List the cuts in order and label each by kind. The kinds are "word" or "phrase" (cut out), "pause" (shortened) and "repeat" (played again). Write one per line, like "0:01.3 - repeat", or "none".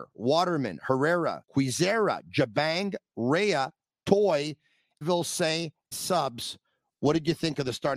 0:01.4 - word
0:05.0 - word
0:05.9 - word